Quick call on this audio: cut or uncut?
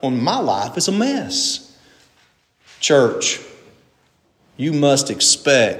uncut